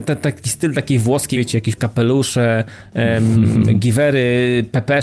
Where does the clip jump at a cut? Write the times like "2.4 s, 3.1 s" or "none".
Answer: 1.3 s, 1.8 s